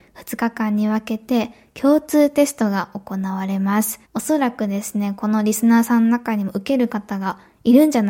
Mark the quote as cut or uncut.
cut